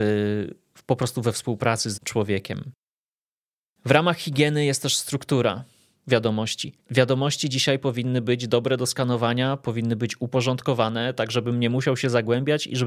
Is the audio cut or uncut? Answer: cut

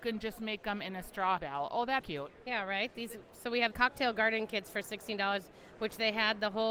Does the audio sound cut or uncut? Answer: cut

